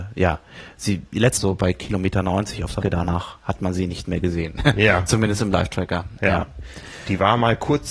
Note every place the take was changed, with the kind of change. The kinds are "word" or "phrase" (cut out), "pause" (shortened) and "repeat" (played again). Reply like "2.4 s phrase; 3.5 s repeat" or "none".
1.4 s phrase; 2.8 s word; 3.4 s pause